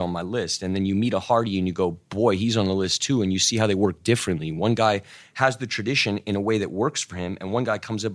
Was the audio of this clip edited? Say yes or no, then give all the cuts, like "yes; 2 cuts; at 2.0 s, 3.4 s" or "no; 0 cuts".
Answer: no; 0 cuts